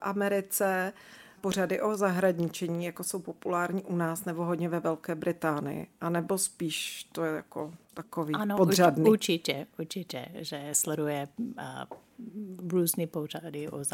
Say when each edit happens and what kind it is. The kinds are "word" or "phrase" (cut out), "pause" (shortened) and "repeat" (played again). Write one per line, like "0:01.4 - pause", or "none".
0:01.4 - phrase
0:10.3 - word